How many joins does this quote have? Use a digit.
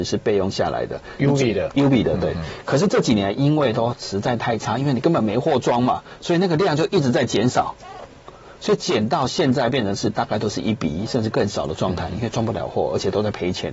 0